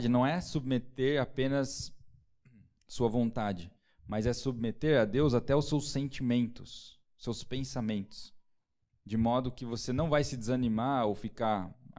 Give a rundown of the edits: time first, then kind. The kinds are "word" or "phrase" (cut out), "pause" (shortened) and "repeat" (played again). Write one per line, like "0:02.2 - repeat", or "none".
none